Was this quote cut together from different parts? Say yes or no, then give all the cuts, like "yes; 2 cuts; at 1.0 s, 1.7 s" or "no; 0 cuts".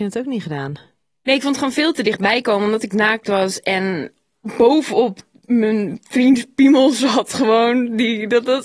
no; 0 cuts